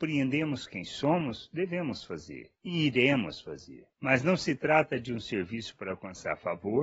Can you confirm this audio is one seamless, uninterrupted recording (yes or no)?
yes